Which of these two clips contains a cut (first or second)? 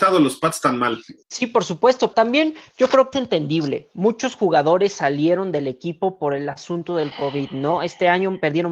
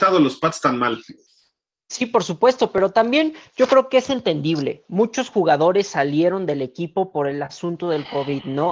first